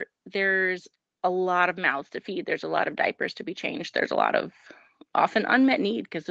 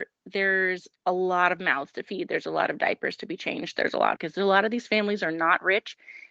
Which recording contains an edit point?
second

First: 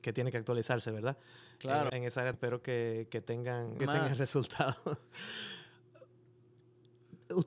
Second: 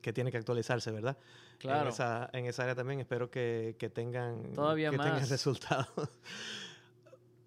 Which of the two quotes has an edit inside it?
first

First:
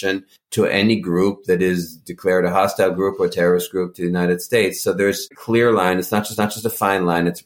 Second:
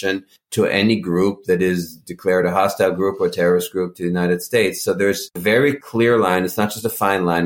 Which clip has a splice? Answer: first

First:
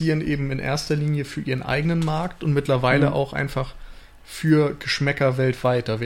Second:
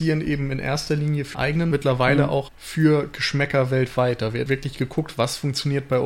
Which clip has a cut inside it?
second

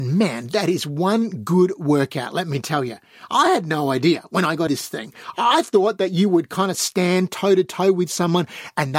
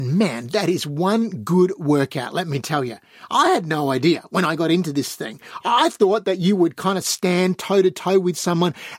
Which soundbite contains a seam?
first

